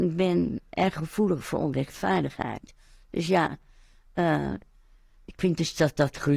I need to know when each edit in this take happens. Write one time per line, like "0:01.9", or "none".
none